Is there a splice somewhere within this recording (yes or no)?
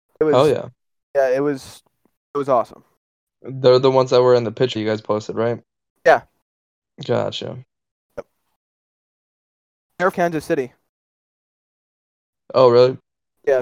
yes